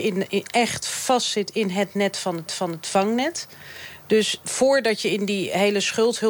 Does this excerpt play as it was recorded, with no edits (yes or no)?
no